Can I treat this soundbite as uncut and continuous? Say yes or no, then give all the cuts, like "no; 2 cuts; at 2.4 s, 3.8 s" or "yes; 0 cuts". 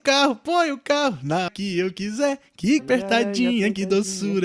no; 2 cuts; at 1.5 s, 2.8 s